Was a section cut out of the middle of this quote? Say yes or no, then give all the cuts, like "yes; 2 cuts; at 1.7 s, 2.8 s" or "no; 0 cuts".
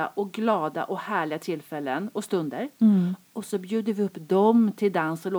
no; 0 cuts